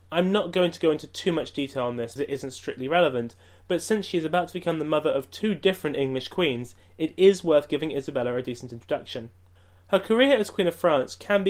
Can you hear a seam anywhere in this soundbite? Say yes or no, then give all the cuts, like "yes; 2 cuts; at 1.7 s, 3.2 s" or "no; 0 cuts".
yes; 1 cut; at 2.2 s